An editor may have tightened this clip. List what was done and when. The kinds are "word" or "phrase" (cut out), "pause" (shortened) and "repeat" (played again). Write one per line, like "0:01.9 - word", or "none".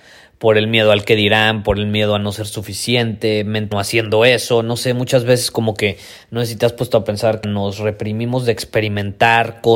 0:03.7 - word
0:07.4 - word